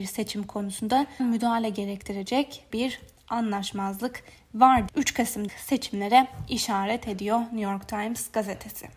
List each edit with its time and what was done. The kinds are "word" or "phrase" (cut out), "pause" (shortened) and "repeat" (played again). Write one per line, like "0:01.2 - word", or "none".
0:01.2 - word
0:02.7 - word
0:04.9 - word
0:05.5 - word